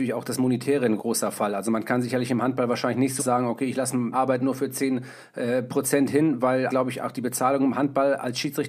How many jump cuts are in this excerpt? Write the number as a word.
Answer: four